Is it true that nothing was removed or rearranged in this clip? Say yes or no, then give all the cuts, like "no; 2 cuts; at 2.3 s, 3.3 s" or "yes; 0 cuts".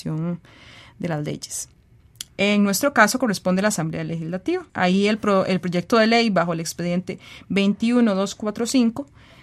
no; 1 cut; at 4.7 s